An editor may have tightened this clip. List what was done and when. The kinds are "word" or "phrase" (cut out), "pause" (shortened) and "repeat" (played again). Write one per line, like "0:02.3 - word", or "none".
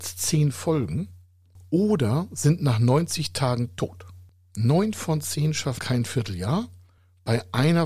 0:05.8 - word